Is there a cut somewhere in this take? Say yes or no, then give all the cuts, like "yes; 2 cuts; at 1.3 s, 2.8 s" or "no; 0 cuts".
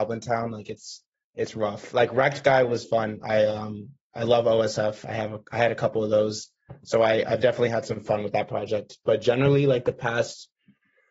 no; 0 cuts